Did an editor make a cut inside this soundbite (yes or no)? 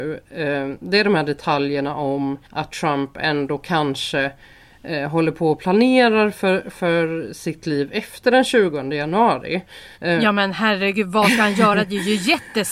yes